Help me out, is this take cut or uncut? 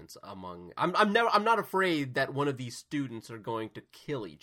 uncut